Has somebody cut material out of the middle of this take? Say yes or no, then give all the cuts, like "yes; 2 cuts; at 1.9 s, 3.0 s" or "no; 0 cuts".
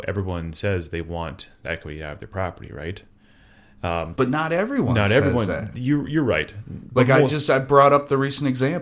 yes; 2 cuts; at 1.6 s, 4.1 s